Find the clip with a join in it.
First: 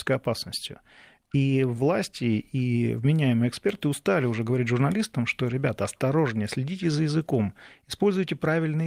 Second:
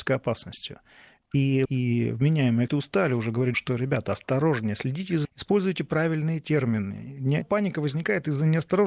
second; 5 cuts; at 1.6 s, 2.7 s, 3.5 s, 5.2 s, 7.4 s

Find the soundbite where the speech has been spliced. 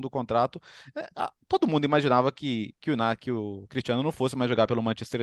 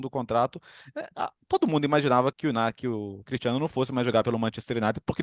second; 1 cut; at 2.3 s

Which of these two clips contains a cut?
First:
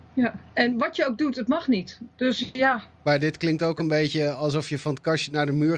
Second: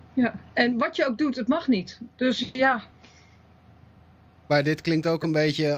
first; 1 cut; at 2.9 s

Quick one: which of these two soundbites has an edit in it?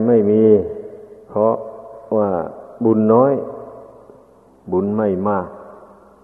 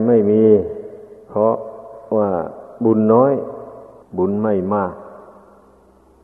second; 1 cut; at 4.0 s

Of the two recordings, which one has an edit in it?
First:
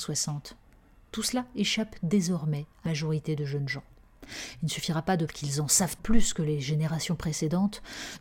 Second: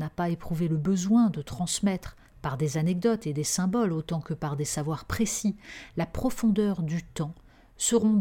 first; 3 cuts; at 2.9 s, 5.3 s, 6.0 s

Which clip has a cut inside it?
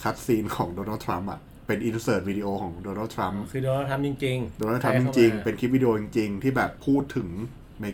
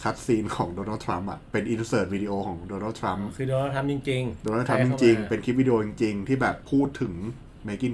second; 1 cut; at 1.4 s

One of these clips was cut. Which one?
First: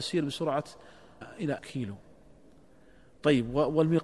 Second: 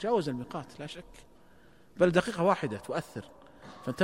first; 2 cuts; at 1.2 s, 1.6 s

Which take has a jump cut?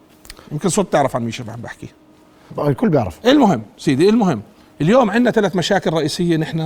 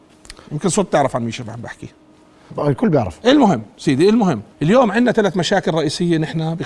second; 1 cut; at 4.5 s

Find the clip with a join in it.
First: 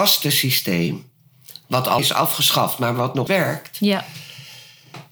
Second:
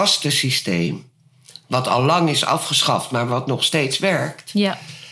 first; 2 cuts; at 2.0 s, 3.3 s

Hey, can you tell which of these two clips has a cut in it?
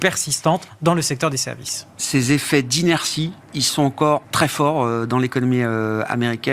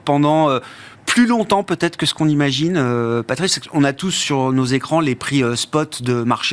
first; 2 cuts; at 3.4 s, 4.2 s

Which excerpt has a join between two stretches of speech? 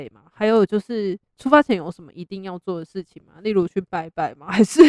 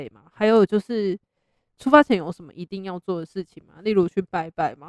first; 1 cut; at 1.3 s

